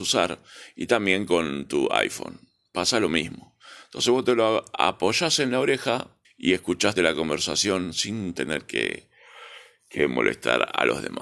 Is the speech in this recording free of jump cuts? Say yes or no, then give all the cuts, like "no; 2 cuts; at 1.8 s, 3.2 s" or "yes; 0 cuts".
no; 2 cuts; at 6.2 s, 7.0 s